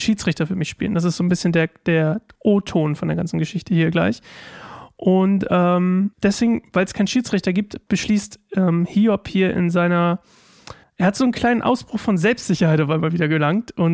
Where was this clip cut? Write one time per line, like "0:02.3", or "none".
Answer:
0:06.1
0:10.8